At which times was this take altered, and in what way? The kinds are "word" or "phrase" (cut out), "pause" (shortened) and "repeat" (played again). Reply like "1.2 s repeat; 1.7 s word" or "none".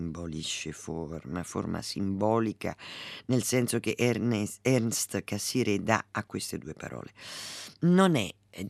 none